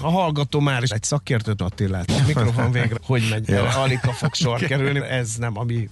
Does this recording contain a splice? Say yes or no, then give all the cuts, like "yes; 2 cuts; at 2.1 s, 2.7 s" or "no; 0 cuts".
yes; 6 cuts; at 0.9 s, 1.6 s, 2.1 s, 3.0 s, 3.4 s, 5.0 s